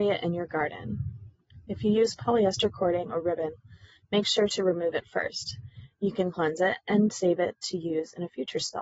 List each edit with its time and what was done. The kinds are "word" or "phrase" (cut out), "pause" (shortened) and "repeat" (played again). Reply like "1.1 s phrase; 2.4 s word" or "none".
none